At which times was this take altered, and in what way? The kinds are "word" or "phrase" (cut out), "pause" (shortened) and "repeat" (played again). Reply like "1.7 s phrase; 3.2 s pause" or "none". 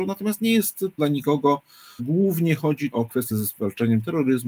1.0 s word; 2.0 s word; 2.9 s word; 3.3 s word